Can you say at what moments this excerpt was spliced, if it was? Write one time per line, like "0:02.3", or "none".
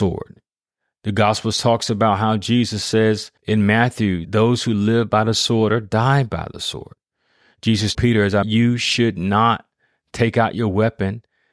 0:03.4
0:04.2
0:07.9
0:08.4